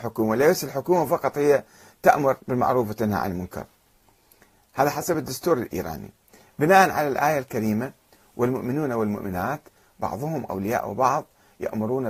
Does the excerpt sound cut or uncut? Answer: uncut